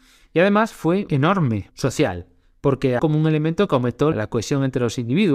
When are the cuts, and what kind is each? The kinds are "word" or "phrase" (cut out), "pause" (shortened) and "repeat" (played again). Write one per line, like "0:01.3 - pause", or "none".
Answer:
0:01.1 - word
0:01.7 - word
0:03.0 - word
0:04.1 - word